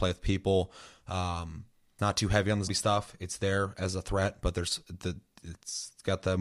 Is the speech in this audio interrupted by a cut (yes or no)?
yes